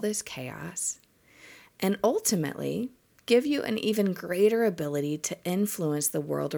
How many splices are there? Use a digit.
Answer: 0